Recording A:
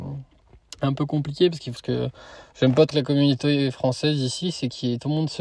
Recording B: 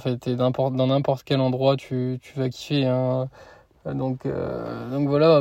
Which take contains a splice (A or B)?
A